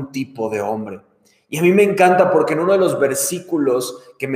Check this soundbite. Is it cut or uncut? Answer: uncut